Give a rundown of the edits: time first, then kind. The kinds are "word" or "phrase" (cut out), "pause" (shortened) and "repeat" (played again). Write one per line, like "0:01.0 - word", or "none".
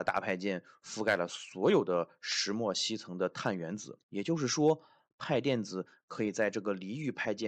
0:04.0 - pause